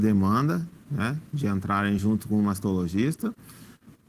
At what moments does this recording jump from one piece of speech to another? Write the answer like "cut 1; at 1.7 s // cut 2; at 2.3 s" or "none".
none

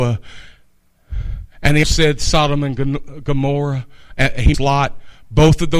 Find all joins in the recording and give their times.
cut 1; at 1.5 s // cut 2; at 1.8 s // cut 3; at 4.5 s

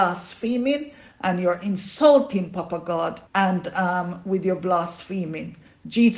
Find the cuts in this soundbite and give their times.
cut 1; at 3.3 s

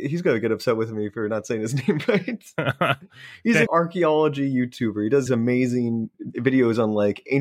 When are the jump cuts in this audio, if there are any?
cut 1; at 3.7 s // cut 2; at 5.3 s // cut 3; at 6.1 s

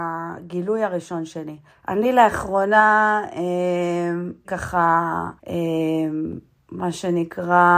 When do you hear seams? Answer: cut 1; at 1.7 s // cut 2; at 4.4 s // cut 3; at 5.4 s

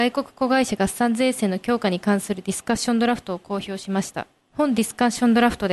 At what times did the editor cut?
cut 1; at 4.4 s

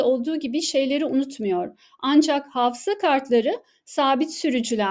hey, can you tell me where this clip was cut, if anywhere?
none

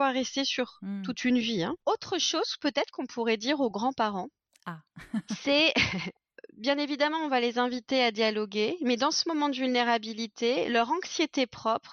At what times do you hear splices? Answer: none

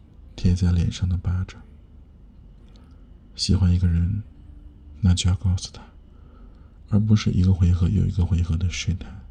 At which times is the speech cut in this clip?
none

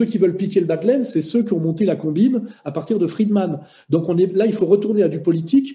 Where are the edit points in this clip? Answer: none

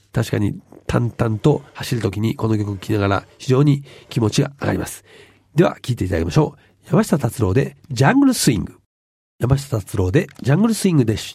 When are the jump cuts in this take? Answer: cut 1; at 1.7 s

